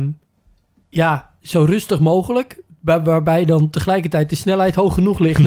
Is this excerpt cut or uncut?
uncut